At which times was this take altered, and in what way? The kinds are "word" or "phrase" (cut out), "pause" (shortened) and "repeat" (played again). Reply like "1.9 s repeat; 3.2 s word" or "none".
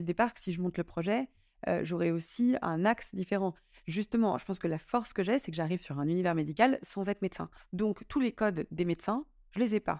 none